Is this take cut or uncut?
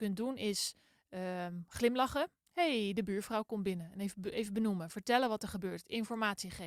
cut